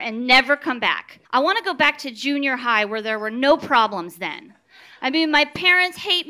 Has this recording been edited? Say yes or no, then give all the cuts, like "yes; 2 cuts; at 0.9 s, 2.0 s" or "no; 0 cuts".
yes; 1 cut; at 1.2 s